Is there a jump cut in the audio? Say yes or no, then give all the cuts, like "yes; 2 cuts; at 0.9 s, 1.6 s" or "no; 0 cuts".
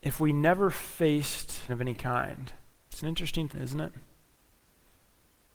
yes; 3 cuts; at 1.7 s, 2.7 s, 3.5 s